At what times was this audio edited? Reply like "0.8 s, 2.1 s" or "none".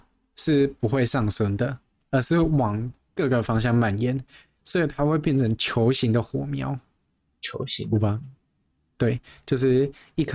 none